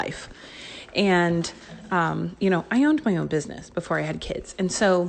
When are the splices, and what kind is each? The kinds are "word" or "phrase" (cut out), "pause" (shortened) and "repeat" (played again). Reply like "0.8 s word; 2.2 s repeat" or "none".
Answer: none

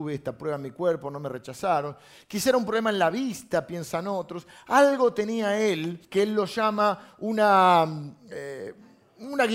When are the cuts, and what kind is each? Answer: 6.0 s pause

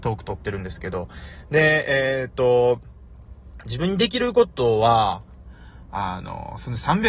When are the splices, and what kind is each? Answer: none

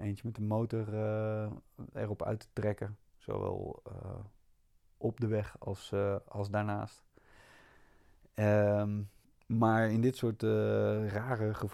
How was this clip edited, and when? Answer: 9.2 s pause

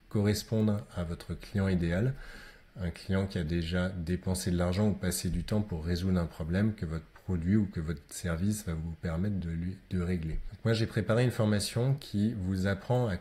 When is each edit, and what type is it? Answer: none

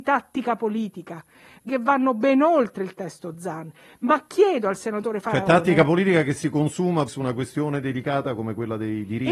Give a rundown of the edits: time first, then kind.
1.7 s word; 7.1 s word

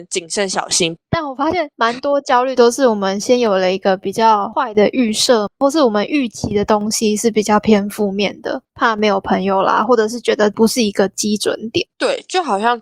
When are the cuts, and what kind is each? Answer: 1.0 s pause; 8.7 s pause; 11.9 s pause

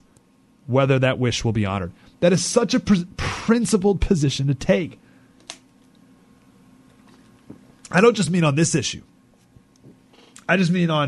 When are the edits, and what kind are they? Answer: none

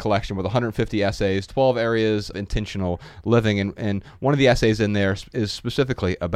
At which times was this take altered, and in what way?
2.3 s word

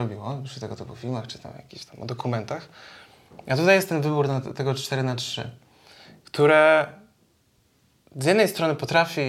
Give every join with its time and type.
none

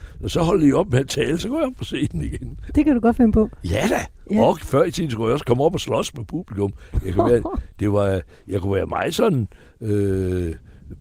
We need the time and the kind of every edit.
none

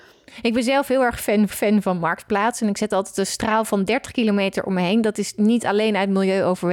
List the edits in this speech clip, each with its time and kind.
1.5 s repeat

